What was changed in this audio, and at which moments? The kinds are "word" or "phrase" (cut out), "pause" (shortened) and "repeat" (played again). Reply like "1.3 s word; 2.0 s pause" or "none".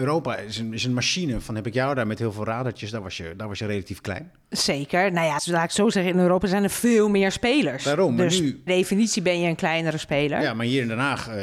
5.4 s word; 8.7 s word